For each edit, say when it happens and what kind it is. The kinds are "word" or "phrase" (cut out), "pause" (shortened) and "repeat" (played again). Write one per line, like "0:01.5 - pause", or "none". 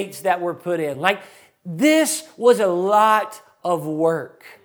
none